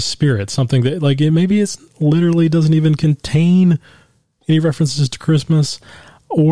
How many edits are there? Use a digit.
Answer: 0